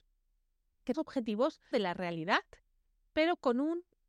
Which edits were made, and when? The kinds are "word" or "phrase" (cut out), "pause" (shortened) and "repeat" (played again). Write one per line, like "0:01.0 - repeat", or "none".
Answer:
0:00.9 - word
0:01.7 - word

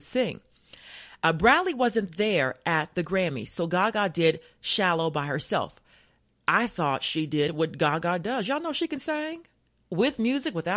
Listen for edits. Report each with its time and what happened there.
none

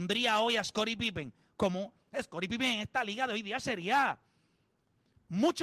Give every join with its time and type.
none

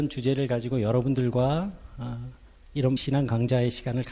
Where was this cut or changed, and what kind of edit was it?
0:03.0 - word

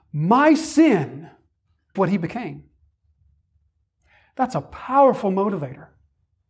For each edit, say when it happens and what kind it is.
0:02.0 - word

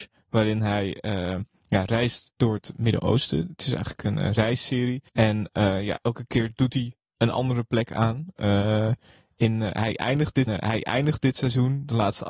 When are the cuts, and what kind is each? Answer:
0:05.1 - pause
0:10.5 - repeat

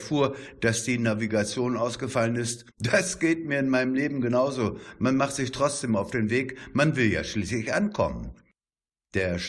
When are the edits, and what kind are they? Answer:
0:02.7 - pause

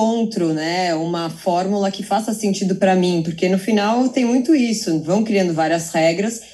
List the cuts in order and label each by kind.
none

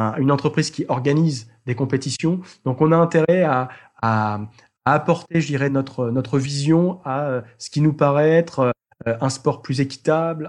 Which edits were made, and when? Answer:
none

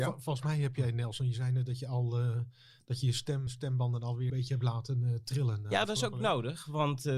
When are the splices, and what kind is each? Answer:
0:03.5 - word
0:04.3 - word

